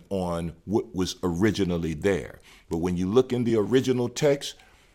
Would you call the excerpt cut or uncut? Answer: uncut